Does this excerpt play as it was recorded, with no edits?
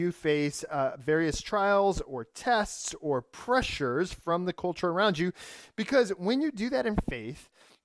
yes; 0 cuts

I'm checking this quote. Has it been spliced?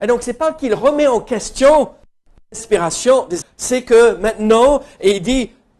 yes; 1 cut; at 3.4 s

